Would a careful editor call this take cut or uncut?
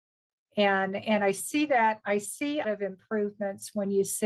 cut